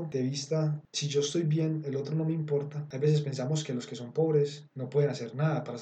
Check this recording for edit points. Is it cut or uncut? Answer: cut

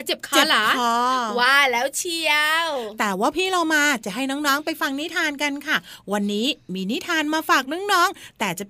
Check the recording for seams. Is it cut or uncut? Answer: uncut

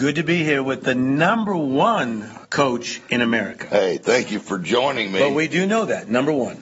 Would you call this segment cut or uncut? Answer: cut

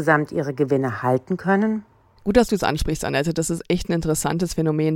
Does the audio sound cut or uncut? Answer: uncut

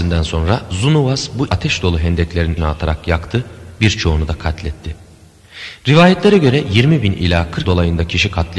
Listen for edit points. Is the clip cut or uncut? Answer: cut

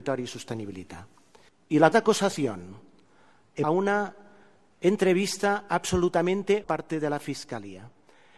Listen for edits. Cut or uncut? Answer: cut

